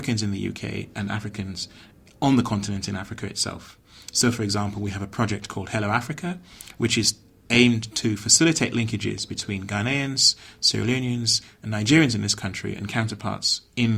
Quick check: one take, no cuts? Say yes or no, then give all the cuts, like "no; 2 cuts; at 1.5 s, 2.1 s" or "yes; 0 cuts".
yes; 0 cuts